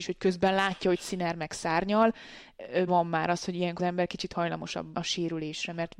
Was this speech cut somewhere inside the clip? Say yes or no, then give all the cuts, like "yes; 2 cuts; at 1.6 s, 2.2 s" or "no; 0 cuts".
yes; 3 cuts; at 2.9 s, 3.8 s, 4.9 s